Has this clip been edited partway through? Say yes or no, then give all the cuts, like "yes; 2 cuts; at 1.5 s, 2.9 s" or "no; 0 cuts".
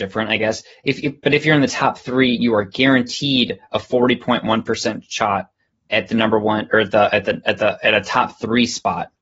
no; 0 cuts